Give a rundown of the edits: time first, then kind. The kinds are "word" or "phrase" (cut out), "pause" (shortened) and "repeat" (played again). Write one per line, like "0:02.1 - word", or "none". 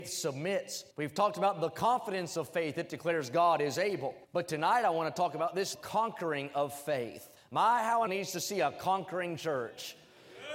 0:00.9 - pause
0:04.2 - pause
0:05.7 - word
0:07.4 - pause
0:08.1 - phrase